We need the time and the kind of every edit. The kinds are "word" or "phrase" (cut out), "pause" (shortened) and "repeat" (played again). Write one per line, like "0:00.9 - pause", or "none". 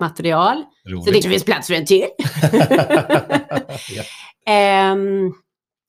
0:01.2 - word